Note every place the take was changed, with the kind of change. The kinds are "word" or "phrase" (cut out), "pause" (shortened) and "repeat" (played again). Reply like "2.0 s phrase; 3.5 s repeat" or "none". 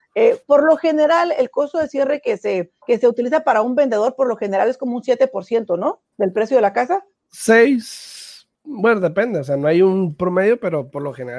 2.8 s pause; 6.1 s pause; 8.5 s pause